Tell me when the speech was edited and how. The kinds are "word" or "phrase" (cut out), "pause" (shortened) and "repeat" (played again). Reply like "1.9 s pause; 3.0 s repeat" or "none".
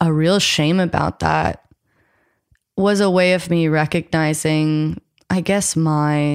none

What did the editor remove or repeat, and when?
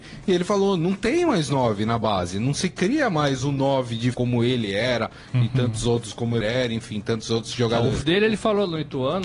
4.1 s word; 6.4 s word; 8.0 s word

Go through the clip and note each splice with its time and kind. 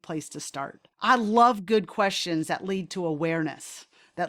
0.9 s pause

